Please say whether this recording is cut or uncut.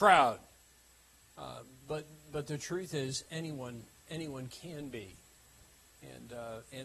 uncut